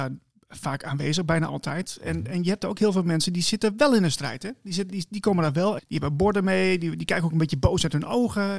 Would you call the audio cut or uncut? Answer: cut